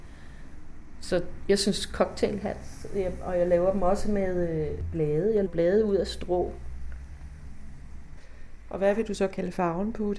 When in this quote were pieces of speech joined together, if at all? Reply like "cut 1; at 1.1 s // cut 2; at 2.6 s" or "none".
cut 1; at 5.5 s